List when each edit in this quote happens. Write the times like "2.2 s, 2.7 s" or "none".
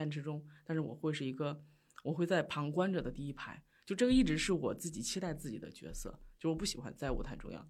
none